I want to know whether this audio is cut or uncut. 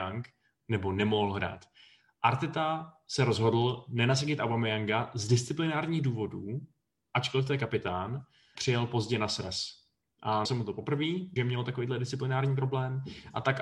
cut